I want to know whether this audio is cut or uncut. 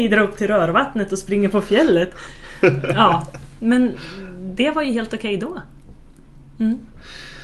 uncut